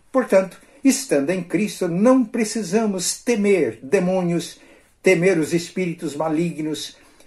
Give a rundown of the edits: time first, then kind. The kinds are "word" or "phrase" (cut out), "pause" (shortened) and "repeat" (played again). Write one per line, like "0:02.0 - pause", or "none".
none